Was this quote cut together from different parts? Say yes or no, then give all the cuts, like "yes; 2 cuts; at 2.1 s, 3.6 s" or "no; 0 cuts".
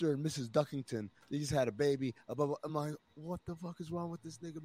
no; 0 cuts